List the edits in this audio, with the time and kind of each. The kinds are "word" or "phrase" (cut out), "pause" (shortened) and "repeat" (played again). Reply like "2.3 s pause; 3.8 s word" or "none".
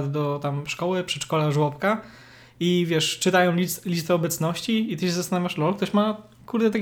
none